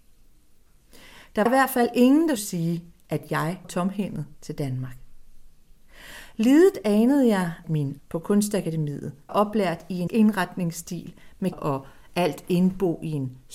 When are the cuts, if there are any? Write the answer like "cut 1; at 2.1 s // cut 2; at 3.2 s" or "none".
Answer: cut 1; at 1.5 s // cut 2; at 2.4 s // cut 3; at 3.6 s // cut 4; at 7.6 s // cut 5; at 8.0 s // cut 6; at 9.3 s // cut 7; at 10.1 s // cut 8; at 11.5 s